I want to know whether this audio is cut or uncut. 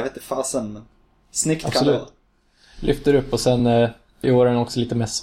uncut